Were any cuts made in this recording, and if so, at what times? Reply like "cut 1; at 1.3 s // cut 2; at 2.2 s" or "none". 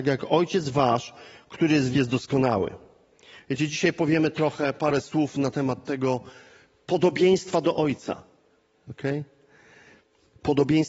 cut 1; at 1.9 s